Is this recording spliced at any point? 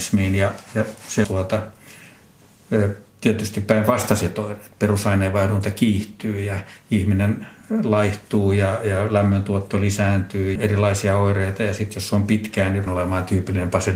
yes; 4 cuts; at 1.2 s, 3.1 s, 10.6 s, 12.9 s

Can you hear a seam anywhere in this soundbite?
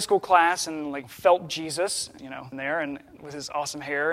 yes; 4 cuts; at 1.0 s, 1.5 s, 2.2 s, 2.5 s

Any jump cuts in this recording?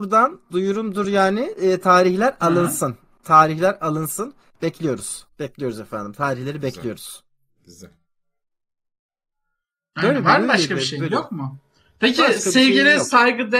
no; 0 cuts

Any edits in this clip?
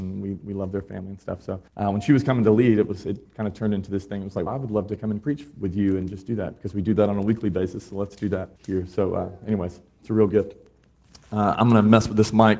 yes; 3 cuts; at 1.7 s, 4.5 s, 8.6 s

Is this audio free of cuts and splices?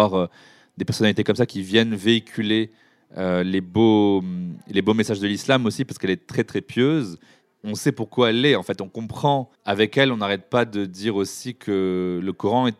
no; 1 cut; at 9.6 s

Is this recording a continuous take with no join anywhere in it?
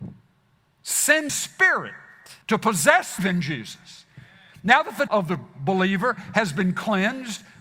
no; 4 cuts; at 1.3 s, 2.4 s, 3.2 s, 5.1 s

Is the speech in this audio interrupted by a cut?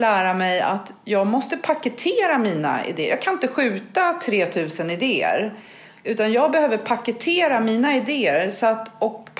no; 0 cuts

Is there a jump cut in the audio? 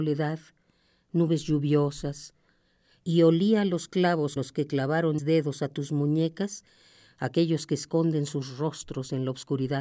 yes; 2 cuts; at 4.4 s, 5.2 s

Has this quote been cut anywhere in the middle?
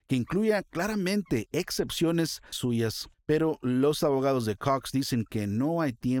yes; 2 cuts; at 2.5 s, 3.1 s

